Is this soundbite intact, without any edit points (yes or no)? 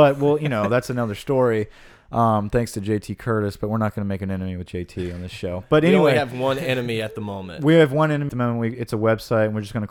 no